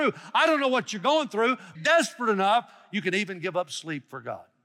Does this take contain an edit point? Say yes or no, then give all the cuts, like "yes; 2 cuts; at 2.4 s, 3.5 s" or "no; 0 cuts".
yes; 1 cut; at 1.7 s